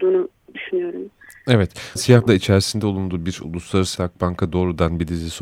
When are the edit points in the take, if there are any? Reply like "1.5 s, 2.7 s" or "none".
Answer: 2.0 s, 2.3 s, 4.0 s